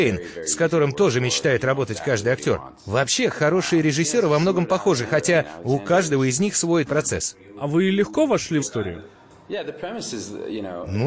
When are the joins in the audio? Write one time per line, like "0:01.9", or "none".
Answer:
0:06.9
0:08.6